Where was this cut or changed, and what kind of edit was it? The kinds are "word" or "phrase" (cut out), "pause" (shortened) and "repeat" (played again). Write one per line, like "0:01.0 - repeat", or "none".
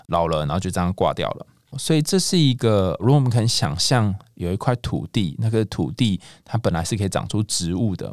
none

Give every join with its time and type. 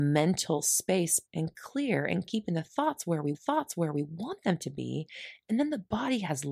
0:01.3 - word
0:02.3 - phrase
0:03.3 - repeat

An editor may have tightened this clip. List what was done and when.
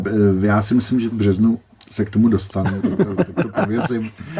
0:01.1 - phrase

